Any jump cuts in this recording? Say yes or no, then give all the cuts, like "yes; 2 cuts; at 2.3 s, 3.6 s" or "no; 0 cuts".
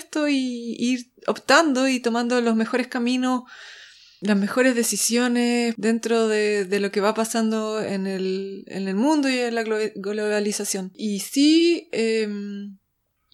no; 0 cuts